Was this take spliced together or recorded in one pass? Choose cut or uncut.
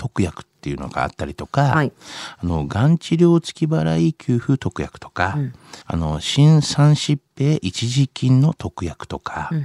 cut